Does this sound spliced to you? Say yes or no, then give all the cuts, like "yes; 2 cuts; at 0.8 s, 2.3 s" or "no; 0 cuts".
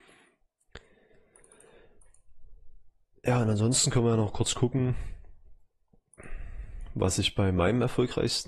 no; 0 cuts